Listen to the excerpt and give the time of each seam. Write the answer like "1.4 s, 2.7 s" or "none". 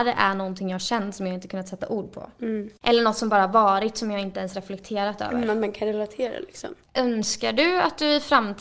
2.8 s